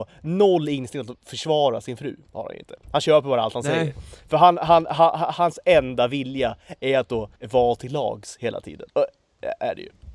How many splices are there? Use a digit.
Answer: 2